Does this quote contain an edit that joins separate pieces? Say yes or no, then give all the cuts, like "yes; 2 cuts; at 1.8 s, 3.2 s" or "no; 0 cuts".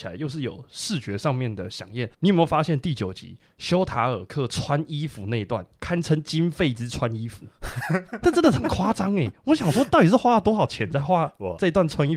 yes; 1 cut; at 2.1 s